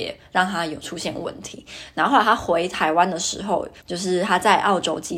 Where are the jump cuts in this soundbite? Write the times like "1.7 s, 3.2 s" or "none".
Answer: 3.8 s